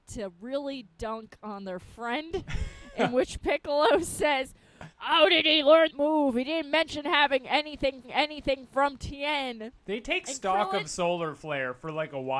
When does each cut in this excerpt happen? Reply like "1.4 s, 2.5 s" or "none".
4.9 s, 5.9 s, 8.0 s, 9.8 s